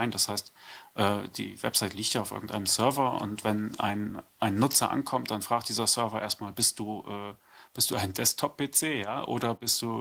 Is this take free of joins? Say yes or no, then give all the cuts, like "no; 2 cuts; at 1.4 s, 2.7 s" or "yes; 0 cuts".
no; 1 cut; at 4.3 s